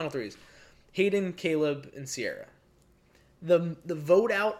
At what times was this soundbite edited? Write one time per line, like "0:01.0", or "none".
none